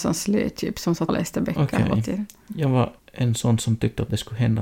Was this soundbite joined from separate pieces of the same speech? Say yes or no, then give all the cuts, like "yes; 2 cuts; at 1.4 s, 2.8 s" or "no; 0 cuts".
yes; 2 cuts; at 1.1 s, 3.0 s